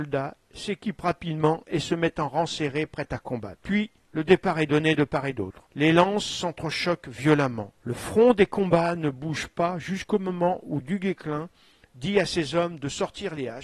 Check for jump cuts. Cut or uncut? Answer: cut